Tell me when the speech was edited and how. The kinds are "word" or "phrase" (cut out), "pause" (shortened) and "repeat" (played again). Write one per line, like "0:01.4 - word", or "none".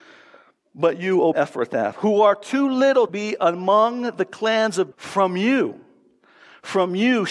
0:01.3 - word
0:03.1 - word
0:04.9 - word